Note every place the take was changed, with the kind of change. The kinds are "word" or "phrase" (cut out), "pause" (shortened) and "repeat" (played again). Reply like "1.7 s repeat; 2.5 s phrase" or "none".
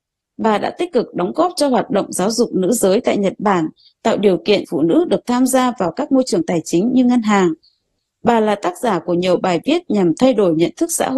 4.6 s word